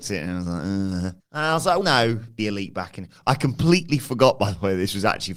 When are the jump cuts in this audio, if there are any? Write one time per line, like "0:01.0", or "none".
0:01.2
0:01.8
0:02.4